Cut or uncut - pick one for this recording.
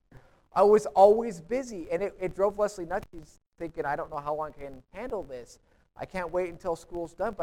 uncut